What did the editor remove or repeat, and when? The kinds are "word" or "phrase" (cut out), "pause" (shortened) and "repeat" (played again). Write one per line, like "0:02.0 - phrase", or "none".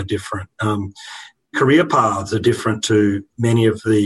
0:01.5 - phrase